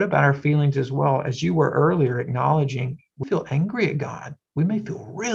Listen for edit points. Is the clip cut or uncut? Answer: cut